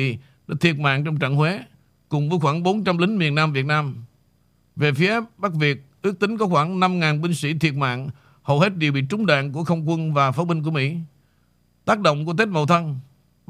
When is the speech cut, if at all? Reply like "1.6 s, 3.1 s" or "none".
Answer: none